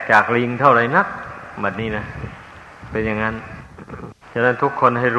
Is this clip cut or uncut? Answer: cut